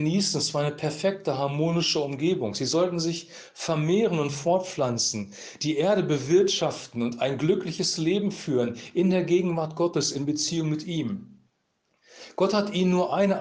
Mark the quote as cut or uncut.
uncut